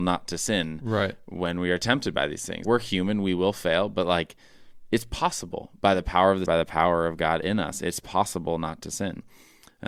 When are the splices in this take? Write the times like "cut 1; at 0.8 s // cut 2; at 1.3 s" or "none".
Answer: cut 1; at 2.6 s // cut 2; at 6.5 s